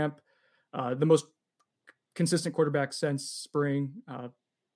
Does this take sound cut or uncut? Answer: uncut